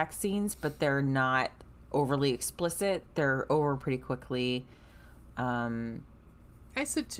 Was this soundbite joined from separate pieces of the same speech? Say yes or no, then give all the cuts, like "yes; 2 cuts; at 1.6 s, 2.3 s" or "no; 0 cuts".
no; 0 cuts